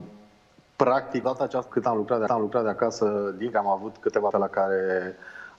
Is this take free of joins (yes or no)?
no